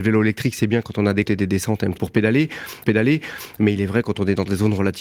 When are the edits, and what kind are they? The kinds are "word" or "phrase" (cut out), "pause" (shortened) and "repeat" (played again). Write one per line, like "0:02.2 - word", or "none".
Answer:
0:01.2 - word
0:02.0 - phrase
0:02.8 - repeat